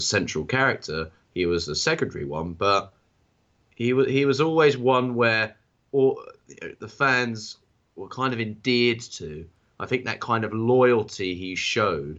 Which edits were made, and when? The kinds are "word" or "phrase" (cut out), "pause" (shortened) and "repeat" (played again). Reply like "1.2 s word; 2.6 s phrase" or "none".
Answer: none